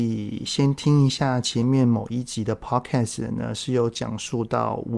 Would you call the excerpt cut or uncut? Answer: uncut